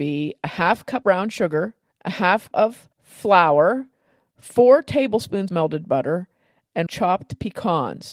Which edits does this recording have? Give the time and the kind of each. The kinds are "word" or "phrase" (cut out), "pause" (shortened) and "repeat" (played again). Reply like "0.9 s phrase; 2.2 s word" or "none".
1.0 s word; 1.9 s pause; 2.5 s word; 2.9 s pause; 5.5 s word; 6.9 s phrase